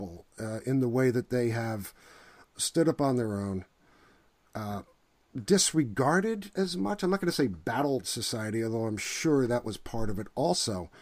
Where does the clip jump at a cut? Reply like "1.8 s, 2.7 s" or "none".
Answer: none

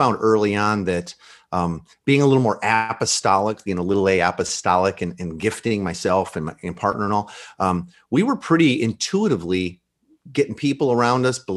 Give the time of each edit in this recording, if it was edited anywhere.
none

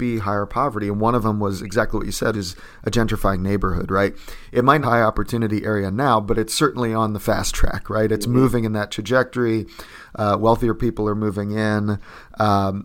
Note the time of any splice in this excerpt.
2.3 s, 4.8 s

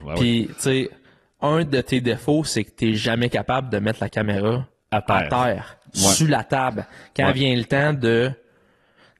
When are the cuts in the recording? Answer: none

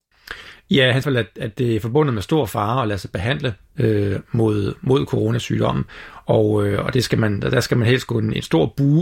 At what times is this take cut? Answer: 1.0 s

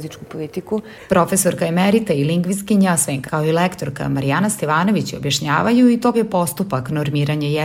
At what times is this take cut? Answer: 3.2 s, 6.1 s

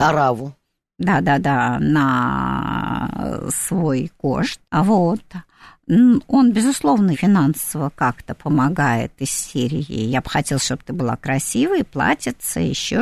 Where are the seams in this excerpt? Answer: 4.6 s, 7.1 s

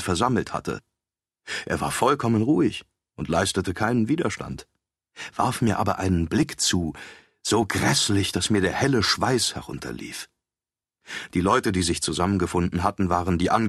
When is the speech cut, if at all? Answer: none

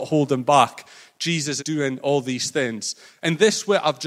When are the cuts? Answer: 1.6 s

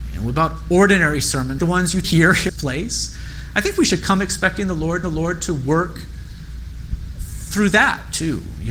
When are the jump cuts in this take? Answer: 1.6 s, 2.0 s, 2.5 s, 5.0 s

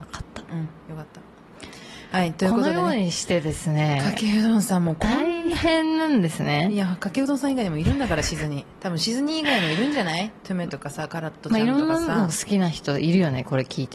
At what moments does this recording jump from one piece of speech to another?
none

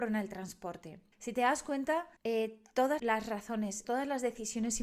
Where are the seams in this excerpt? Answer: 1.1 s, 2.2 s, 3.0 s, 3.8 s

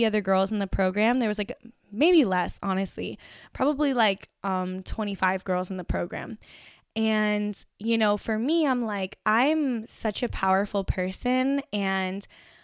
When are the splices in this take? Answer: none

